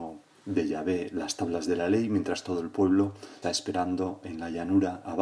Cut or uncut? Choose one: cut